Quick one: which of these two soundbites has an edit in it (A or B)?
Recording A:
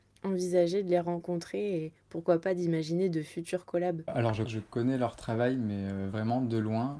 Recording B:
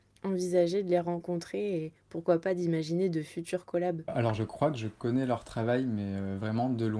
A